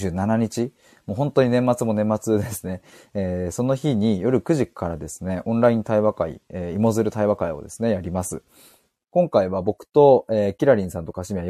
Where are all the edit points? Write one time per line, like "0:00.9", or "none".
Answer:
none